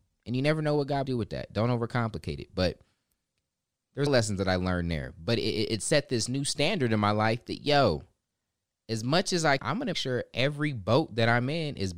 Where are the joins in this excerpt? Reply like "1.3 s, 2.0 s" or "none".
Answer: 1.1 s, 4.1 s, 9.6 s, 9.9 s